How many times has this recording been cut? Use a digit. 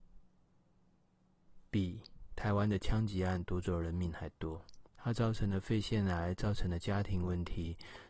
1